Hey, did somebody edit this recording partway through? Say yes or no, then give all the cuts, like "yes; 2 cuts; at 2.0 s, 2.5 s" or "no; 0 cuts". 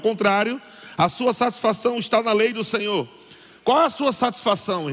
no; 0 cuts